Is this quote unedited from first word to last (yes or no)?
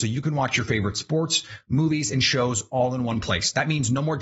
yes